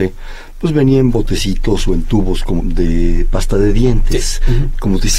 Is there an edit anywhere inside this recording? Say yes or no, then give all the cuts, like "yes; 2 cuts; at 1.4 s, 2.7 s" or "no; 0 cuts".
yes; 1 cut; at 2.6 s